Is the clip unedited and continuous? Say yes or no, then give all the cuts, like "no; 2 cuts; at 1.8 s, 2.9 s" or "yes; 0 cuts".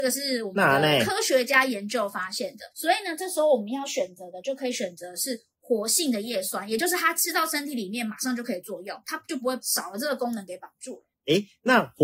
no; 2 cuts; at 2.7 s, 11.1 s